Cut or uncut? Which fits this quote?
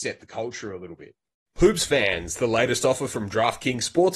uncut